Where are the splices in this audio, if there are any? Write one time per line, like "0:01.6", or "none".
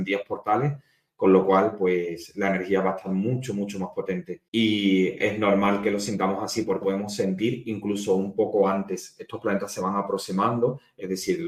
0:04.5
0:06.8